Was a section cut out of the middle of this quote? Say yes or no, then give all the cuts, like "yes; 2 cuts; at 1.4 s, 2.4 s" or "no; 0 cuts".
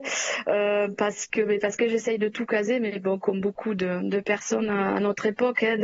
no; 0 cuts